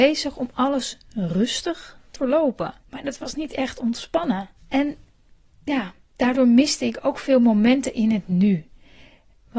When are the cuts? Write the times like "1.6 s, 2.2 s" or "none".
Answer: 2.2 s, 2.8 s, 4.6 s